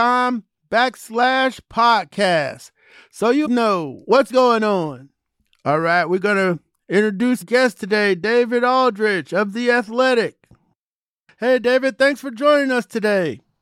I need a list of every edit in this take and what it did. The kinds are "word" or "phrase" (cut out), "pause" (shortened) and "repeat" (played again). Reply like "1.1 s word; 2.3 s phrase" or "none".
3.4 s word; 4.3 s word; 7.4 s word